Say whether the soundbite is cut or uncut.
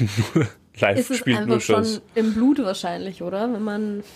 uncut